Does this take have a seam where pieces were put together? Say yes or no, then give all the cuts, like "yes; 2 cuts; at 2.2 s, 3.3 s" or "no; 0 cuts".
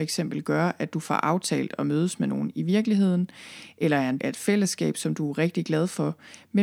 yes; 1 cut; at 4.2 s